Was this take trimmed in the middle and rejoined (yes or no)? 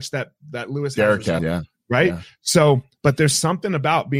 yes